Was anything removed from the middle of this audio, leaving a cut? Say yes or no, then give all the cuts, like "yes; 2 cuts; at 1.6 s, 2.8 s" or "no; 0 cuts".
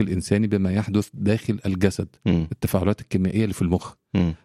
no; 0 cuts